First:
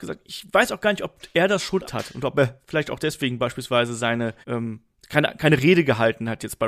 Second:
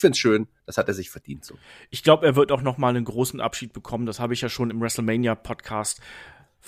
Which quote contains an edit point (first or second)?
first